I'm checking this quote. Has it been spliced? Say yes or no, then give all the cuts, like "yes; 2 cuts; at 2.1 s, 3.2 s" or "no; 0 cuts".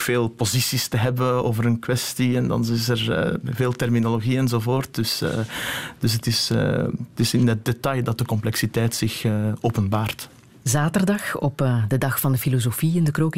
no; 0 cuts